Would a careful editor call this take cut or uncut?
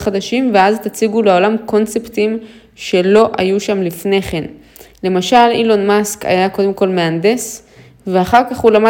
uncut